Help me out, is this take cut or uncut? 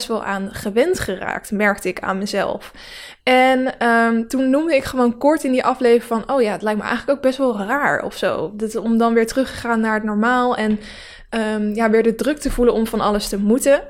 uncut